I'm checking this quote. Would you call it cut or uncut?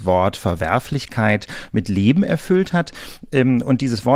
uncut